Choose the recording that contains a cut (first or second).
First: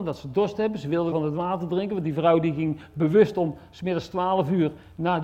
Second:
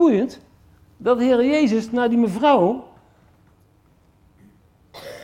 first